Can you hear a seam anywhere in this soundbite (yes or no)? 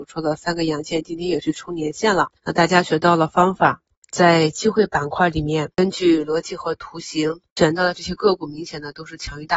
yes